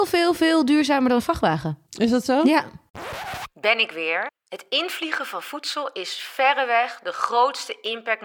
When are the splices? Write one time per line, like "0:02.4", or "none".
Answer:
0:01.9